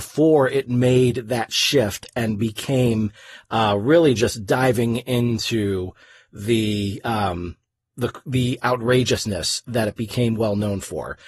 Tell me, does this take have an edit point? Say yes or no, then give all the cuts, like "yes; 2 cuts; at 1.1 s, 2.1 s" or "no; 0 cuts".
no; 0 cuts